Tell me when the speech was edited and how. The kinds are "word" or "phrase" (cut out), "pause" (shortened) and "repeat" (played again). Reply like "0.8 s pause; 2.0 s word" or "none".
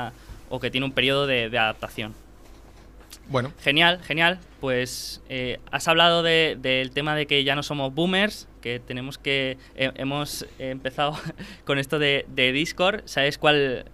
9.7 s pause